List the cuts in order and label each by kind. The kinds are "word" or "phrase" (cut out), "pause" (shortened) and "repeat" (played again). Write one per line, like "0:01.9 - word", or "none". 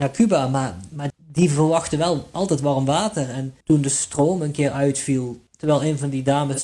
0:01.1 - word
0:03.6 - pause
0:05.5 - pause